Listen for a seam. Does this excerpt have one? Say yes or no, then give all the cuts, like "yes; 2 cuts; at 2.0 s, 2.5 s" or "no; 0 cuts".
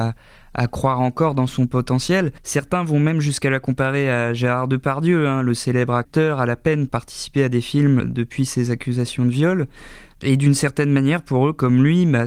yes; 3 cuts; at 2.4 s, 6.9 s, 8.0 s